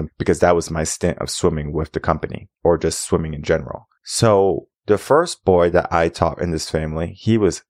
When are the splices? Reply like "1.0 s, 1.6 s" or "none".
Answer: 2.5 s, 4.8 s